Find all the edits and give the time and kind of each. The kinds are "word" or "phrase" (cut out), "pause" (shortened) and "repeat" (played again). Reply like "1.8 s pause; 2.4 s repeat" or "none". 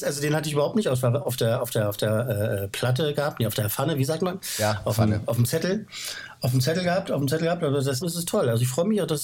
8.0 s phrase